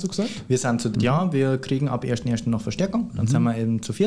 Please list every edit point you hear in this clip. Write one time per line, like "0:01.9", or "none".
0:00.9